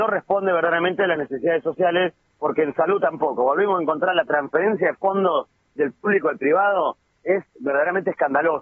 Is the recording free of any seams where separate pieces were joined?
yes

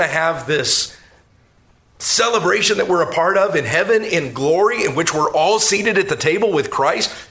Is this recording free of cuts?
yes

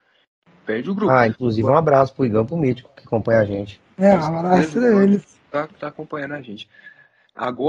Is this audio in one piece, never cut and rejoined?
yes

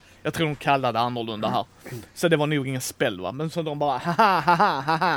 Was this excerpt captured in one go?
yes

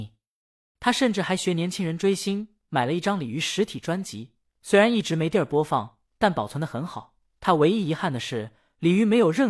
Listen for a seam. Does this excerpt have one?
no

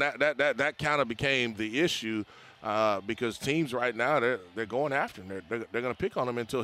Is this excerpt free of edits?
yes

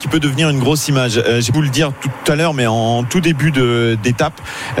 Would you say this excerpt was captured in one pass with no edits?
no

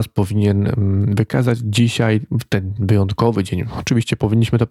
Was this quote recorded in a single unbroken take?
yes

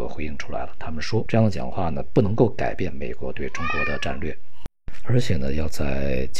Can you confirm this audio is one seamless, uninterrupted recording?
no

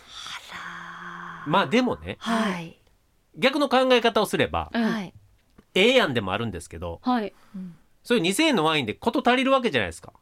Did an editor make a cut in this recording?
no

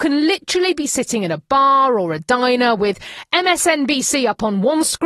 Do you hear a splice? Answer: no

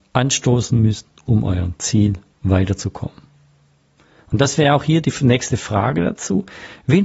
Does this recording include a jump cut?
no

